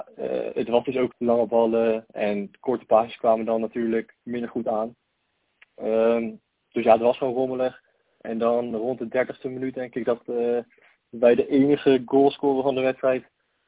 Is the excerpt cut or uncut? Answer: cut